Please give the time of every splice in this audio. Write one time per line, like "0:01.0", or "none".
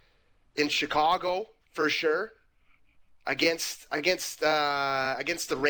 none